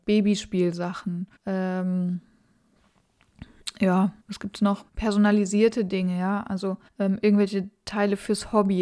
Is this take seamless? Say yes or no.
no